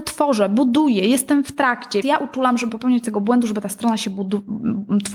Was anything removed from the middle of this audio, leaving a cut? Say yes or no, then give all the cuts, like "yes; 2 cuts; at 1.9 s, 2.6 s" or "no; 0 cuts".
yes; 2 cuts; at 2.0 s, 2.7 s